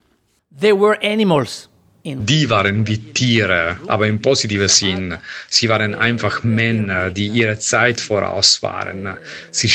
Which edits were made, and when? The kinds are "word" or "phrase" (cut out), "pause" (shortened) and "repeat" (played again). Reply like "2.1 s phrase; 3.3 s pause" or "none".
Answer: none